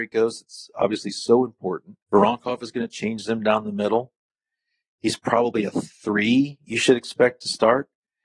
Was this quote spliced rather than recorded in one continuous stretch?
yes; 1 cut; at 2.0 s

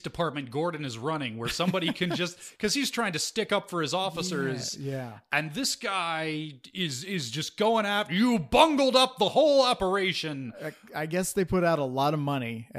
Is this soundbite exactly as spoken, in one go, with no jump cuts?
yes; 0 cuts

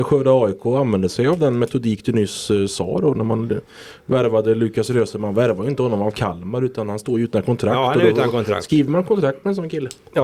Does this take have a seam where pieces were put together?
no; 0 cuts

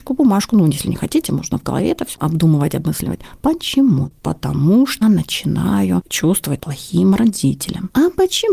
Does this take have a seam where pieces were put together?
yes; 3 cuts; at 2.1 s, 5.0 s, 6.6 s

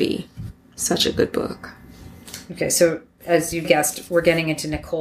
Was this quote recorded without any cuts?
no; 1 cut; at 3.6 s

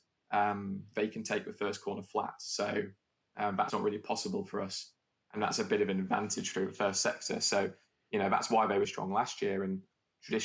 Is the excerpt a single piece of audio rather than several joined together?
no; 2 cuts; at 3.7 s, 8.8 s

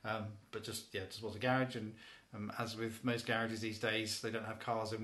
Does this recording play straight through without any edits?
yes; 0 cuts

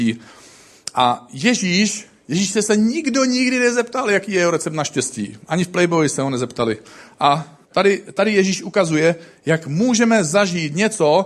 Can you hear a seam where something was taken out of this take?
yes; 1 cut; at 7.6 s

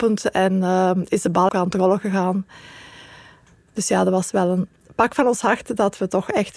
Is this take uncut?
no; 1 cut; at 1.5 s

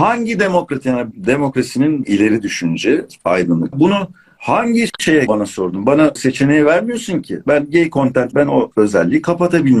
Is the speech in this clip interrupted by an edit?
yes; 6 cuts; at 1.1 s, 2.0 s, 3.7 s, 5.3 s, 6.2 s, 8.3 s

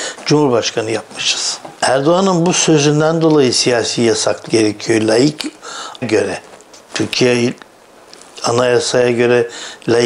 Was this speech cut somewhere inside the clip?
yes; 3 cuts; at 1.7 s, 4.5 s, 6.0 s

